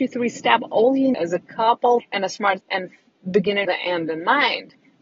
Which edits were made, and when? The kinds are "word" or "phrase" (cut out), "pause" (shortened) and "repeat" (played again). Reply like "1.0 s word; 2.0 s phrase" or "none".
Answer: 1.1 s word; 2.0 s word; 2.6 s word; 3.6 s word